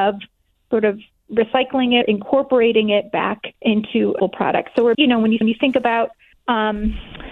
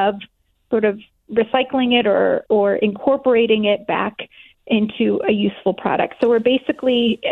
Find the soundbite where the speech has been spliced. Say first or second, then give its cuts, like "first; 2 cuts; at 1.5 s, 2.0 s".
first; 6 cuts; at 2.0 s, 3.6 s, 4.2 s, 4.9 s, 5.4 s, 6.3 s